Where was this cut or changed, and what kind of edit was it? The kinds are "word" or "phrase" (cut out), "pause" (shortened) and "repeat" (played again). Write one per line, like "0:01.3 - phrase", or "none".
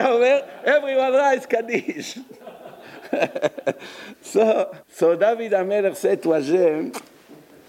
0:04.8 - pause